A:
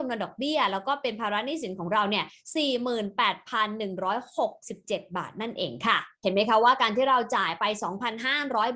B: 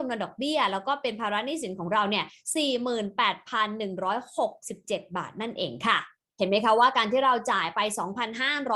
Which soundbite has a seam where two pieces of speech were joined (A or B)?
A